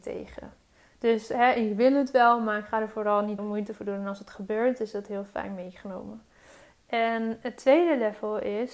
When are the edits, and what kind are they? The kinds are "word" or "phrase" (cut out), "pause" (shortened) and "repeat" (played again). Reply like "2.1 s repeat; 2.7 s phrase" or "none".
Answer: 3.4 s phrase